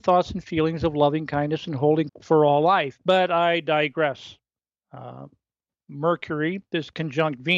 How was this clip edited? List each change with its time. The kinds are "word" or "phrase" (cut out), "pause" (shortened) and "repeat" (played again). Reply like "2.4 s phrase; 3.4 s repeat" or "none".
2.1 s word; 4.6 s pause

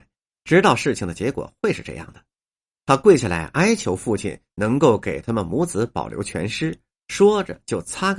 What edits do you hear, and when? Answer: none

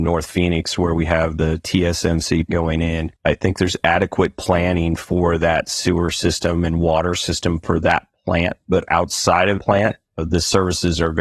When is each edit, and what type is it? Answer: 2.5 s word; 3.2 s pause; 9.6 s word

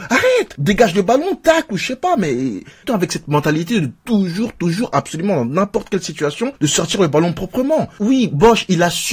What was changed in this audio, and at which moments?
6.6 s pause

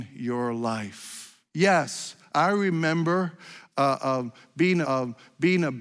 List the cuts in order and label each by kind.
1.5 s pause; 4.8 s repeat

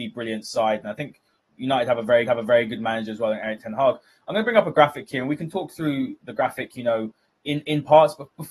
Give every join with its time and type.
2.3 s repeat; 6.2 s word

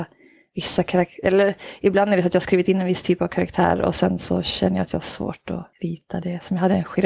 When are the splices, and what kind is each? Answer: 5.7 s pause

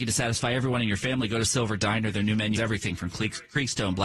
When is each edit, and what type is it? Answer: 2.5 s word

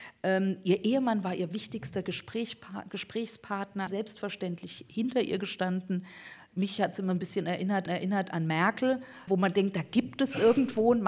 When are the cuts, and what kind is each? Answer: 3.9 s phrase; 7.9 s repeat; 9.3 s word

